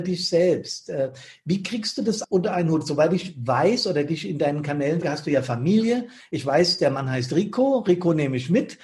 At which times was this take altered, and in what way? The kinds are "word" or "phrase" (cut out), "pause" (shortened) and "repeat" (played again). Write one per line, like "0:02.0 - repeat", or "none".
0:02.2 - word
0:05.0 - word